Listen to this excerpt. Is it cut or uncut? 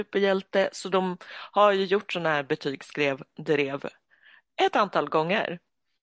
uncut